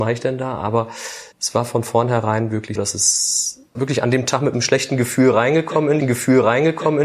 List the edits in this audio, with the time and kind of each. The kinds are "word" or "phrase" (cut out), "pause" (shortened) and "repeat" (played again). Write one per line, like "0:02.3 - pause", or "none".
0:01.3 - pause
0:02.7 - word
0:03.7 - word
0:06.0 - repeat